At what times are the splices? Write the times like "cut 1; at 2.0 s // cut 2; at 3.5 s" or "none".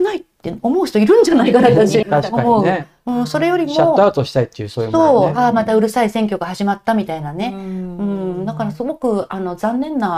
cut 1; at 2.0 s